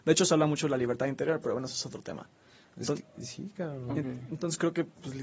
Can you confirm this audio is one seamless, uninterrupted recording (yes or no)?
yes